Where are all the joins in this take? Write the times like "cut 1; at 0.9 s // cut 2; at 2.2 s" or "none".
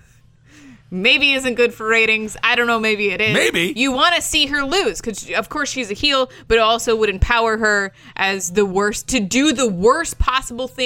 none